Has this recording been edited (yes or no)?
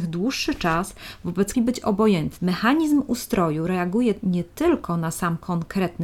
yes